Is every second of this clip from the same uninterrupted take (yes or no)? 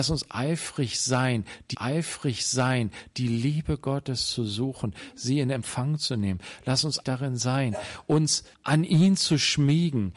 no